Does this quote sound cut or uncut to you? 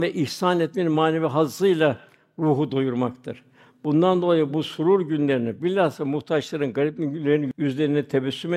uncut